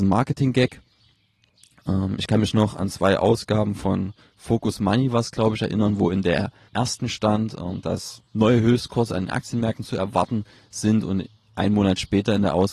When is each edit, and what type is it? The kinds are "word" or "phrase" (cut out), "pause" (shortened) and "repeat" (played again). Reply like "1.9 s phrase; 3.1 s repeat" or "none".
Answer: none

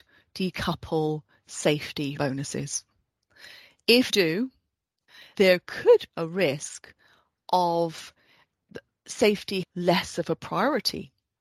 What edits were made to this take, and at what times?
2.2 s word; 4.1 s word; 5.3 s word; 6.1 s word; 9.6 s word

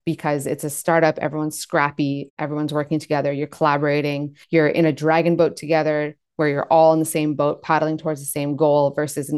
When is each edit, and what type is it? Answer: 4.4 s pause

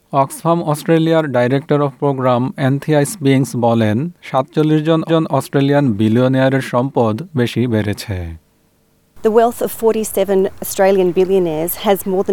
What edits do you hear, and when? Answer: 5.1 s repeat; 7.4 s word

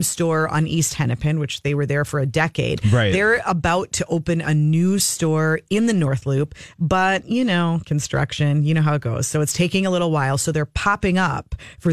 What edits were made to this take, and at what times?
none

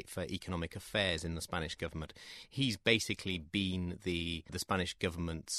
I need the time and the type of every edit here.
none

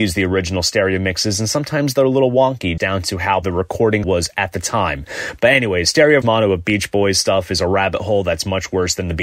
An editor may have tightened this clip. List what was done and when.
2.8 s word; 3.4 s word; 4.0 s word; 6.2 s word

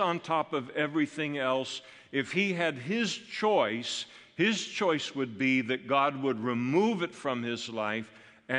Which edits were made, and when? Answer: none

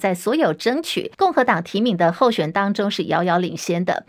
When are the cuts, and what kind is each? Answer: 1.1 s pause

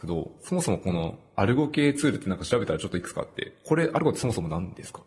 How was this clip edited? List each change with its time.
none

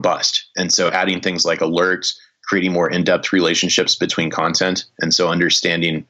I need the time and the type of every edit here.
none

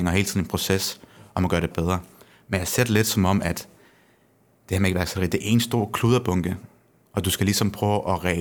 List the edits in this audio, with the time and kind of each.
1.7 s word

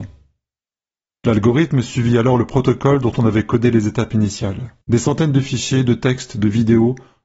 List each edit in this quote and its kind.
4.8 s pause

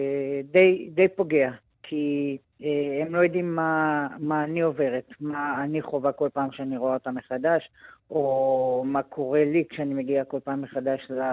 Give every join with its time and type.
2.5 s pause

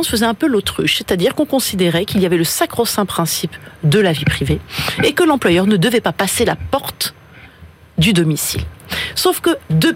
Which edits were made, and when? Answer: none

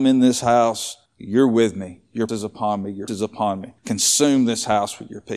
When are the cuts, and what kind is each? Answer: 1.1 s pause; 2.3 s word; 3.1 s word; 3.8 s pause

